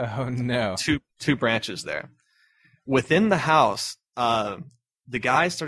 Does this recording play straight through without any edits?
yes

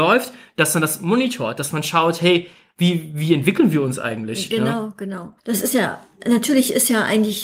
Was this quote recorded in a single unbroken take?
no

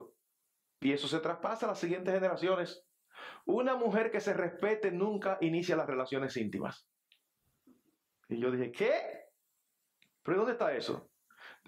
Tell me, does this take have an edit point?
no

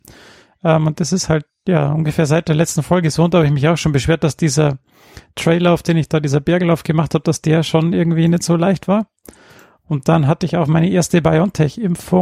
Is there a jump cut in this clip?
no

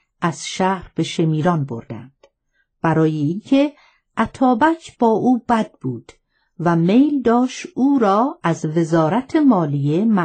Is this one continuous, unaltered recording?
yes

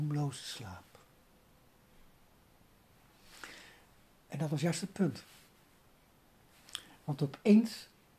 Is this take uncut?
yes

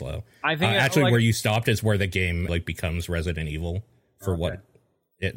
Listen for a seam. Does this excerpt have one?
yes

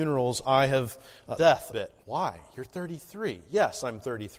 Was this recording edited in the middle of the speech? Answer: yes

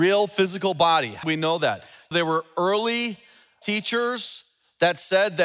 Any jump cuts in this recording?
yes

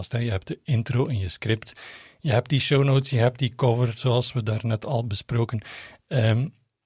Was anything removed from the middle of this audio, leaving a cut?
no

